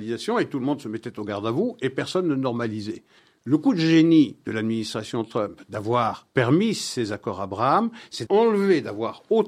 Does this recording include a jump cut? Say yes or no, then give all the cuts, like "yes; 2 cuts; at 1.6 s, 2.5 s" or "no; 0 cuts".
yes; 3 cuts; at 3.2 s, 6.3 s, 8.3 s